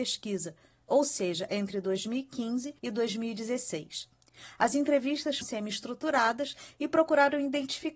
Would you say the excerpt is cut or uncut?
cut